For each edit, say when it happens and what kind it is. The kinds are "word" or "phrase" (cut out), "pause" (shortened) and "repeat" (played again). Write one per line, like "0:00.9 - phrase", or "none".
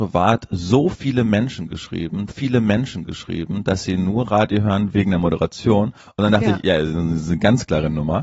0:02.3 - repeat
0:06.0 - pause